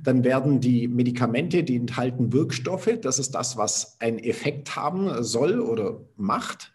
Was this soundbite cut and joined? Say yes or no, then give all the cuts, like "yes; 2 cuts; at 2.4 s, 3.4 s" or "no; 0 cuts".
no; 0 cuts